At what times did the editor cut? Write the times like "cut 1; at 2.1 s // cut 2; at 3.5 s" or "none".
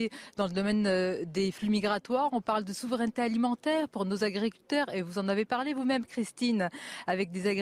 none